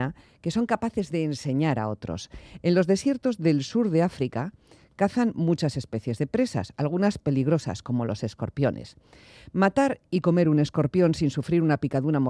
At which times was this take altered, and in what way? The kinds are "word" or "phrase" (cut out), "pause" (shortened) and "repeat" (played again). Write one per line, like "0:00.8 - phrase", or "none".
none